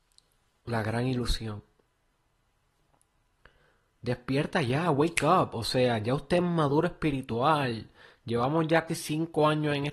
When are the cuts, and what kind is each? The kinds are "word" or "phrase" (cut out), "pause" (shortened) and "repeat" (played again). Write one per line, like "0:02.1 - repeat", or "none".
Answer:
0:08.9 - word